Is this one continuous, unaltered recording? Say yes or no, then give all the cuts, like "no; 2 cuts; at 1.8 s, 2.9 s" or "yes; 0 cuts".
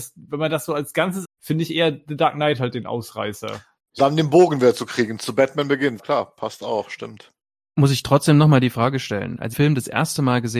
no; 4 cuts; at 1.2 s, 4.0 s, 6.0 s, 9.5 s